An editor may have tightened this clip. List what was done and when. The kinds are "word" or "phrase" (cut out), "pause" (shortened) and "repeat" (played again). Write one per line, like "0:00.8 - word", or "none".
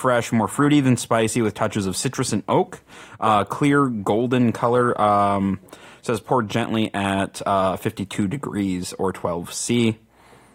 none